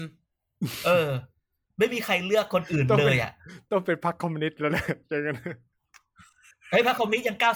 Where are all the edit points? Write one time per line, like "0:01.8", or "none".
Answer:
none